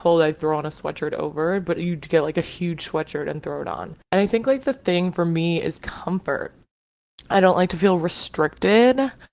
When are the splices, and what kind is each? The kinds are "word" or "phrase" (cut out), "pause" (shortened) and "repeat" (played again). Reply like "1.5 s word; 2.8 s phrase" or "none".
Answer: 4.0 s pause